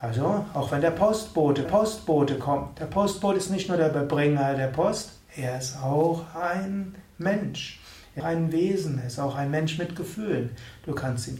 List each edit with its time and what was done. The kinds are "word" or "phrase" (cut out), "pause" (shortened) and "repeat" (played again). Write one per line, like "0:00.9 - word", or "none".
0:01.6 - repeat
0:08.2 - phrase